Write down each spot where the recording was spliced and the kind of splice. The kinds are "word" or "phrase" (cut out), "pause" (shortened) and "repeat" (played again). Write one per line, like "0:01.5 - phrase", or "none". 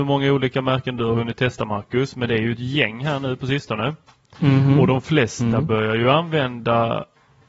none